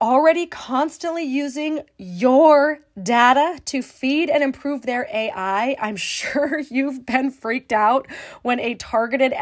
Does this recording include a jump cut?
no; 0 cuts

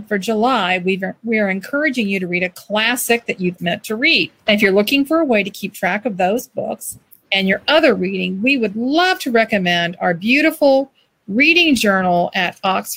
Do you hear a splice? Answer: yes; 2 cuts; at 3.6 s, 4.4 s

